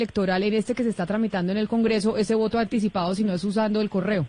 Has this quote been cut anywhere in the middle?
no; 0 cuts

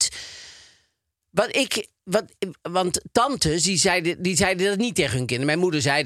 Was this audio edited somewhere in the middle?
no; 0 cuts

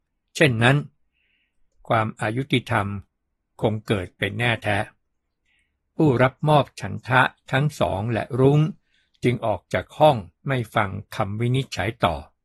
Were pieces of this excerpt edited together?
yes; 1 cut; at 10.4 s

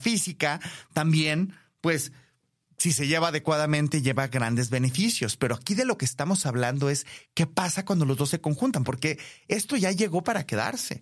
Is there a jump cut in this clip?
no; 0 cuts

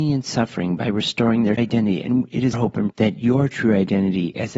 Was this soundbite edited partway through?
yes; 3 cuts; at 1.6 s, 2.5 s, 2.9 s

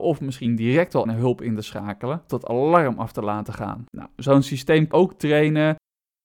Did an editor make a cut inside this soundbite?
yes; 4 cuts; at 1.0 s, 2.3 s, 3.9 s, 4.9 s

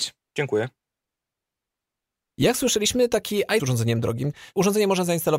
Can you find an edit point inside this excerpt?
yes; 1 cut; at 3.6 s

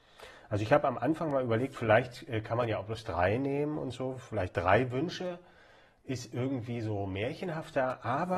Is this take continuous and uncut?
yes; 0 cuts

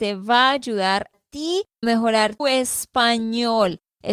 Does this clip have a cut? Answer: yes; 3 cuts; at 1.1 s, 1.8 s, 2.4 s

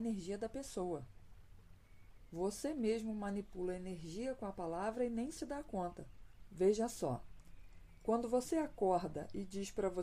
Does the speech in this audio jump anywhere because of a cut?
no; 0 cuts

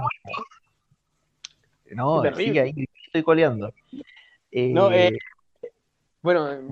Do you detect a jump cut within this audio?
no; 0 cuts

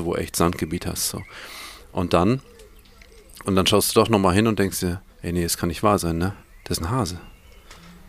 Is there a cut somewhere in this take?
yes; 3 cuts; at 3.4 s, 5.1 s, 6.4 s

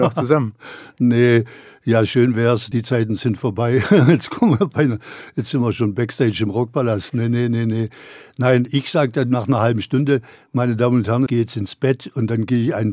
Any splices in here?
yes; 1 cut; at 11.3 s

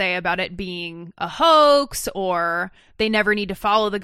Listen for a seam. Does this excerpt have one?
no; 0 cuts

